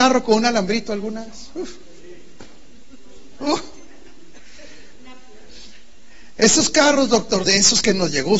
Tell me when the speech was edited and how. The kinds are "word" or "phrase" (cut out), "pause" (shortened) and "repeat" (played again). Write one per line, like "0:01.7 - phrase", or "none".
0:07.4 - phrase